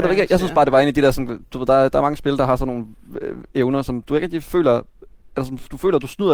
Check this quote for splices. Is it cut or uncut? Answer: uncut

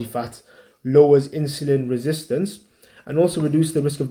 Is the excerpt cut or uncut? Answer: uncut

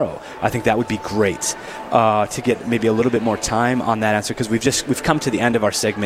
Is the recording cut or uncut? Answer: uncut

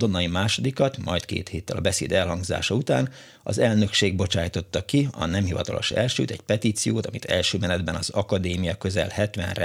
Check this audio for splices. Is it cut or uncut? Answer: uncut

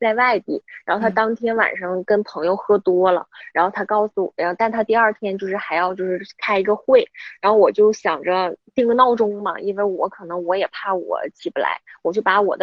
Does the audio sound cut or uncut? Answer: uncut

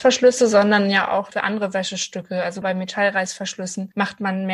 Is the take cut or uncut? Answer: cut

